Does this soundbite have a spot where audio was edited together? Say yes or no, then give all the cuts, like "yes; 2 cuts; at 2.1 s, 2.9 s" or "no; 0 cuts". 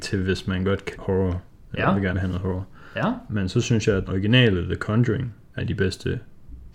yes; 4 cuts; at 0.9 s, 2.1 s, 4.0 s, 5.6 s